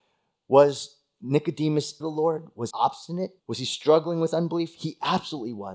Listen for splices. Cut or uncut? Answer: cut